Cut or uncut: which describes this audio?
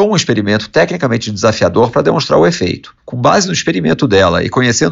cut